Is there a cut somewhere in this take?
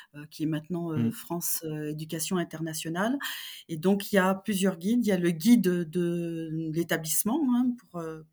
no; 0 cuts

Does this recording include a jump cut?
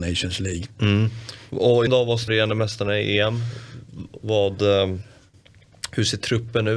yes; 2 cuts; at 1.9 s, 2.3 s

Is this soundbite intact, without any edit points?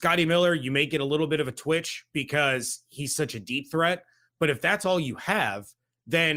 yes; 0 cuts

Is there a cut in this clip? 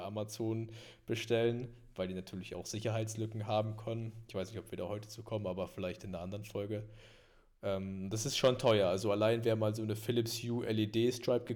no; 0 cuts

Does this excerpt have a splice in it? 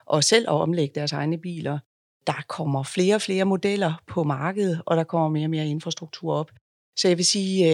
no; 0 cuts

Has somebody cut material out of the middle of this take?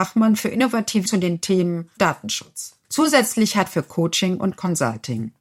yes; 4 cuts; at 1.1 s, 2.0 s, 2.8 s, 3.7 s

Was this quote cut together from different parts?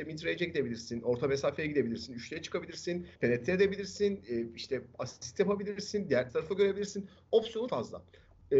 yes; 3 cuts; at 3.2 s, 6.3 s, 7.7 s

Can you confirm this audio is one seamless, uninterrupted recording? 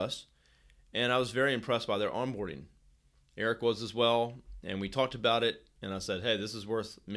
yes; 0 cuts

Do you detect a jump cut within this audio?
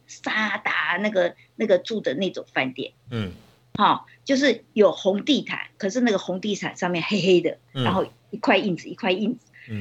yes; 1 cut; at 3.0 s

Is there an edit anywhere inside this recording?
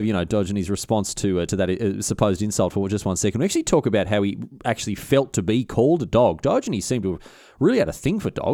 no; 0 cuts

